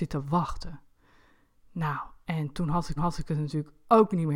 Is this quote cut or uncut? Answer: cut